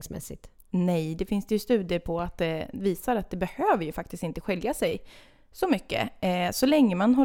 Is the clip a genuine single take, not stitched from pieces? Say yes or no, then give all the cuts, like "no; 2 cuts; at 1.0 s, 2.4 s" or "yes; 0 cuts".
yes; 0 cuts